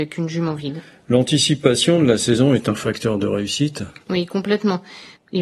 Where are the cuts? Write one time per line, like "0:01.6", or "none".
0:04.0